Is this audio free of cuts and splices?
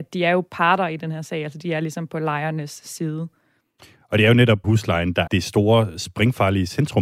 no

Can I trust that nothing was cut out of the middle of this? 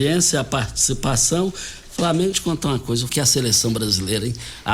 no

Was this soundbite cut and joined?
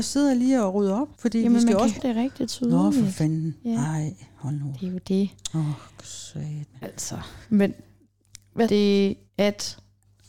yes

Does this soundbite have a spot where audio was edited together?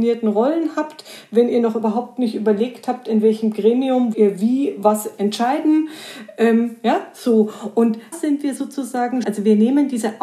yes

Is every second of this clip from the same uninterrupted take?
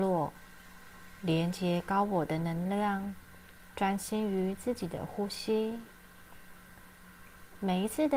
no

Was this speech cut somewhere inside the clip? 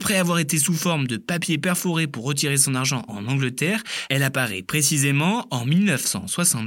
no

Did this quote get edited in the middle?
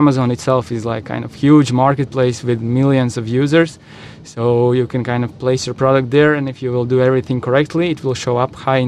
no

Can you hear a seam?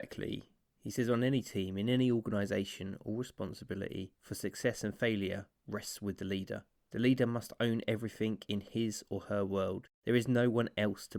yes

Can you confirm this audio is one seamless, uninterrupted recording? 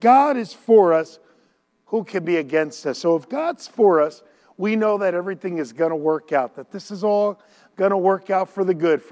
yes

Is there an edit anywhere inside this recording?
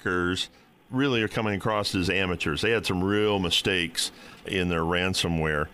no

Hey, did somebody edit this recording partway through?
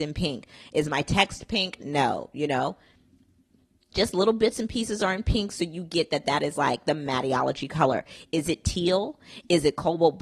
no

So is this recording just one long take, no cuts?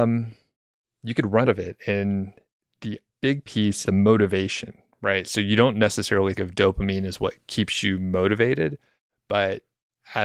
no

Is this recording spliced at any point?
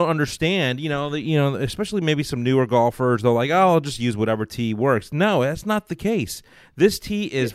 no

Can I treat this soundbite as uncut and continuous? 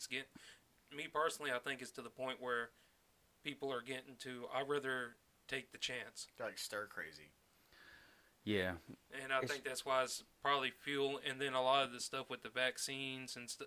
yes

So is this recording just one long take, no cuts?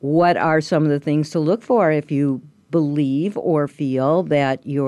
yes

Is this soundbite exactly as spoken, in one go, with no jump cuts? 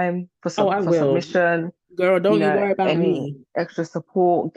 yes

